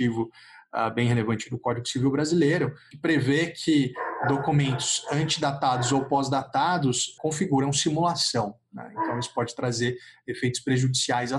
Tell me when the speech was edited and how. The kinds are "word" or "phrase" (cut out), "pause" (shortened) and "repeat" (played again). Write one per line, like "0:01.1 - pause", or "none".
none